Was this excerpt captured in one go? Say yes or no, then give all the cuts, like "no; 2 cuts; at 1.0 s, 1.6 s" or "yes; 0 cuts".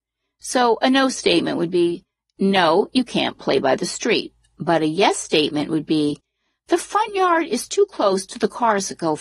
yes; 0 cuts